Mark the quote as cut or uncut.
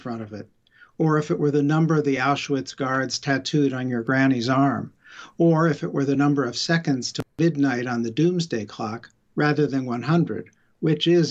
uncut